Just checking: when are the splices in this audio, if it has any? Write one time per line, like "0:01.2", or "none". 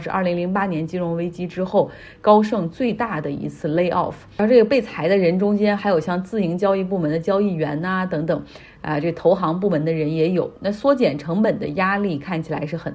none

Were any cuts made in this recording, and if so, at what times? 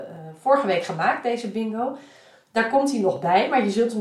none

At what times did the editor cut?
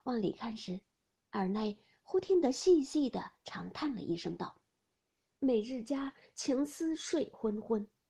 none

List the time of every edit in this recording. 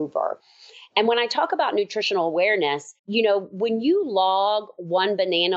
0:03.0

